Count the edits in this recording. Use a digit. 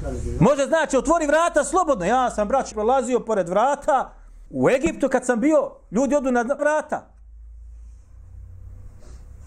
3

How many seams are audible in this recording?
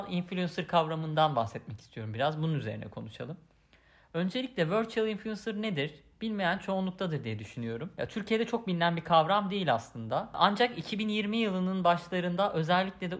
0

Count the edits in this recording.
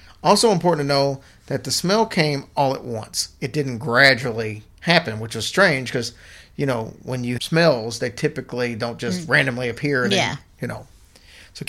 2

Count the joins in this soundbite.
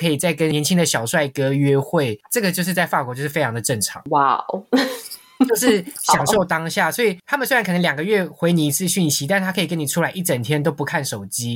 0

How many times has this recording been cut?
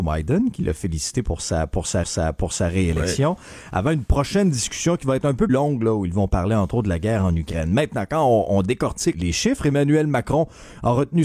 3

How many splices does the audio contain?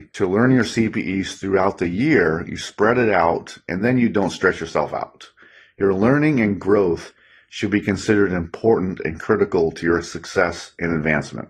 0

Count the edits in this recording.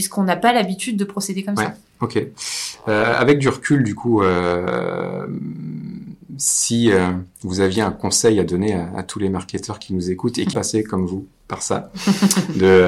1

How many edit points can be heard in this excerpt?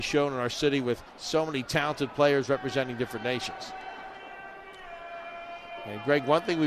1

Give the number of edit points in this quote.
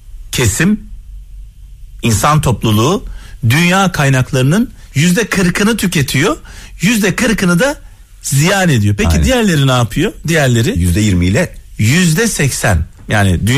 0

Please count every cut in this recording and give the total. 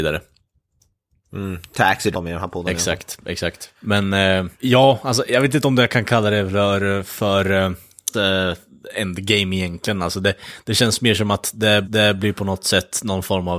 5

